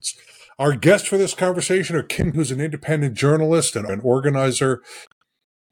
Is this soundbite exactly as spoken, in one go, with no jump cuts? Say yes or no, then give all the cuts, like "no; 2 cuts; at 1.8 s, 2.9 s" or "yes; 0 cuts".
no; 2 cuts; at 2.3 s, 3.9 s